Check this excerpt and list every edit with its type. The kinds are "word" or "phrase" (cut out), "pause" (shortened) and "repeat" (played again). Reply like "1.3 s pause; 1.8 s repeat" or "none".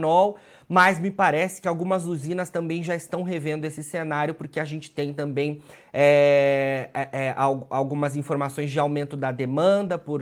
none